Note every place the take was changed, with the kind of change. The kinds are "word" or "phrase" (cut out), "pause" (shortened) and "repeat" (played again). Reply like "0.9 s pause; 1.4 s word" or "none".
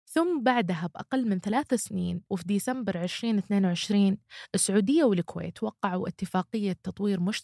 2.3 s pause